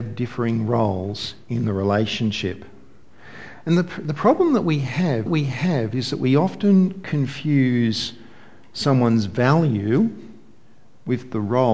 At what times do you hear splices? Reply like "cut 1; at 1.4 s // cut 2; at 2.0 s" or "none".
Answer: cut 1; at 5.3 s